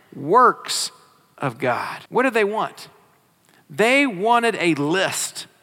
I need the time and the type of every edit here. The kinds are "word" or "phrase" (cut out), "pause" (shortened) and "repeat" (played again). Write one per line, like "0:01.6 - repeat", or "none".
0:02.1 - pause